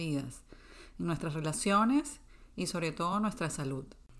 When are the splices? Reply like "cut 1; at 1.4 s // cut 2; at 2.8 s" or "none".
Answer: none